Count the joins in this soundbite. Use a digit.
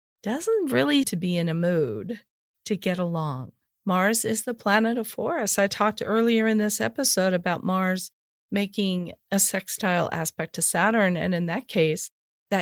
1